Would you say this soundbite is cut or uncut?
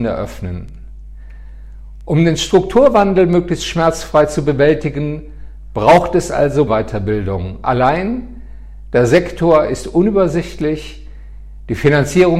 cut